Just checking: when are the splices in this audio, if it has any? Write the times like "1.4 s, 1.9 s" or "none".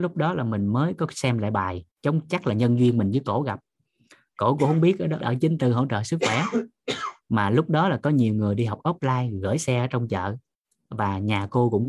1.9 s, 5.2 s